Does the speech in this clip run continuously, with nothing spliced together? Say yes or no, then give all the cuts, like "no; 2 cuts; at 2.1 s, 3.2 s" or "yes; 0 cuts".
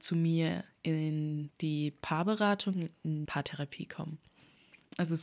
no; 1 cut; at 3.3 s